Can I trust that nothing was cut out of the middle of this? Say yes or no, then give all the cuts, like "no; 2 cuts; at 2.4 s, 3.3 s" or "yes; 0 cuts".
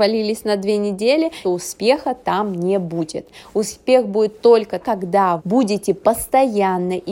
no; 3 cuts; at 1.4 s, 4.8 s, 5.4 s